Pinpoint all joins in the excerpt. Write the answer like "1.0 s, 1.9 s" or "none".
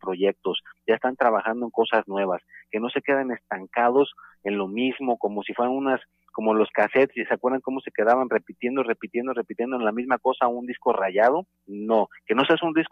11.5 s